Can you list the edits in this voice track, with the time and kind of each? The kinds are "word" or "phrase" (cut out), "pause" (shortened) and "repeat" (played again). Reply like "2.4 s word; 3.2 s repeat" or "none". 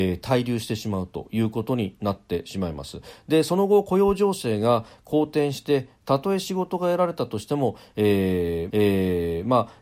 8.7 s repeat